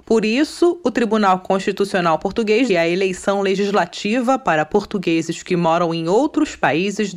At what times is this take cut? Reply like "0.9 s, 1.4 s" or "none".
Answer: 2.7 s